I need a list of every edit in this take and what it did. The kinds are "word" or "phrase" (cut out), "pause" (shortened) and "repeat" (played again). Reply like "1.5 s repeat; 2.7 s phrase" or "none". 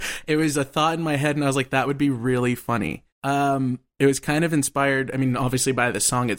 3.1 s pause